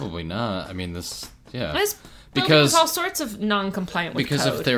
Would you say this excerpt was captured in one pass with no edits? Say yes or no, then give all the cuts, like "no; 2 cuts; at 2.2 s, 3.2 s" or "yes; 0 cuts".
yes; 0 cuts